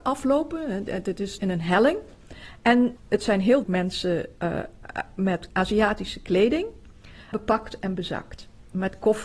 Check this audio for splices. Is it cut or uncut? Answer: cut